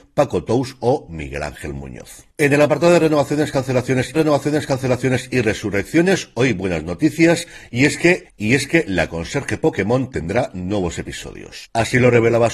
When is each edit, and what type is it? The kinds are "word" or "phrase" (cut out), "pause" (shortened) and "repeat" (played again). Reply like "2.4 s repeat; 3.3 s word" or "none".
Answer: 2.3 s pause; 4.1 s repeat; 8.2 s word

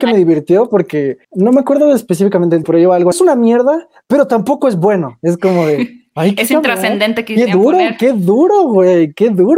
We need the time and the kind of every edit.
1.2 s pause; 2.6 s word; 3.1 s phrase

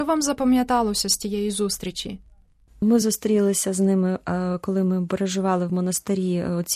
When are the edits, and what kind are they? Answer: none

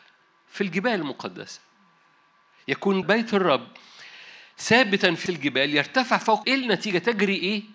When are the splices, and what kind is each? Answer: 3.0 s word; 5.3 s word; 6.4 s word

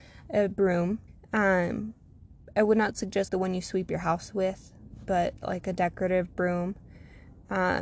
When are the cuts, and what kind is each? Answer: 1.1 s pause; 3.3 s word

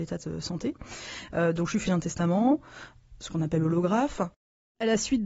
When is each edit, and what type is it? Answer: 1.9 s word

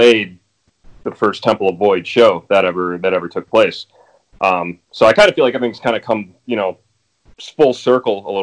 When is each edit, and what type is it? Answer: none

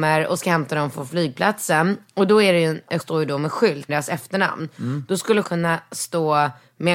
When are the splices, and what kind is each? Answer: 3.0 s word; 3.9 s word; 5.4 s word

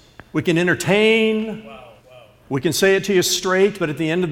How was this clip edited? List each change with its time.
2.0 s pause

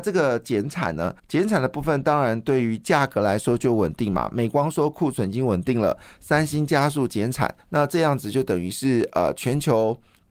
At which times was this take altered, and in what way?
1.2 s pause; 7.6 s pause

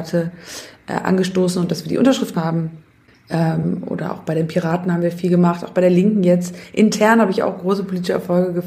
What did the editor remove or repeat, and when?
2.3 s word

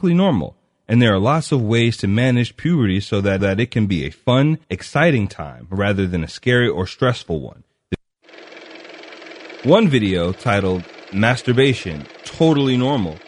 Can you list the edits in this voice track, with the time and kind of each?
3.4 s repeat; 4.6 s pause

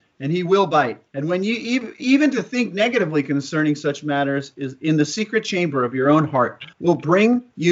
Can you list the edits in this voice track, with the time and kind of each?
1.1 s pause; 2.0 s word; 6.7 s pause

